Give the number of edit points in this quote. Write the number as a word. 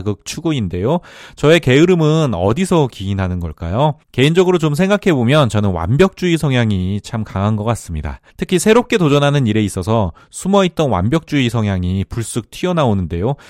two